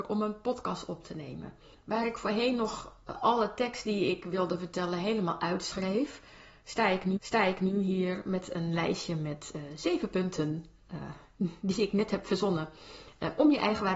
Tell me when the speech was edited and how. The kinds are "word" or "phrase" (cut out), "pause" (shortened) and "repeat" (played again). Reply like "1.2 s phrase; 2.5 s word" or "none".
7.2 s repeat